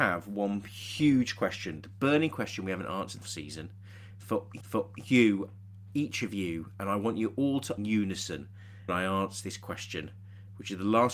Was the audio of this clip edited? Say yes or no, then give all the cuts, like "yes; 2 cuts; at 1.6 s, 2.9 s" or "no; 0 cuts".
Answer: yes; 4 cuts; at 3.2 s, 4.6 s, 7.8 s, 8.9 s